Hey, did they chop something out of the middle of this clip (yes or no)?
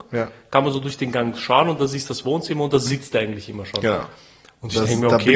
no